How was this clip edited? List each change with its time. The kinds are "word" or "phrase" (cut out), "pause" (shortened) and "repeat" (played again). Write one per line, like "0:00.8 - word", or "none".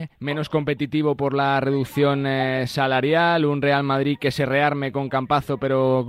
none